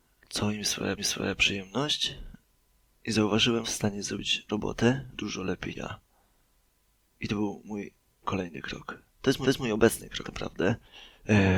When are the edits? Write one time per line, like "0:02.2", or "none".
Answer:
0:01.0
0:03.6
0:04.5
0:05.1
0:05.7
0:08.1
0:09.1
0:09.4
0:10.2